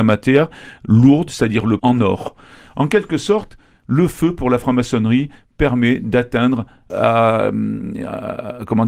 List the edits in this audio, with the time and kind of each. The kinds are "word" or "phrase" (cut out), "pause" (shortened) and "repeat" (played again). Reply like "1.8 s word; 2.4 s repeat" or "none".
1.8 s word; 6.9 s word